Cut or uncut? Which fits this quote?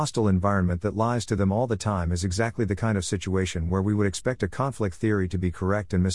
uncut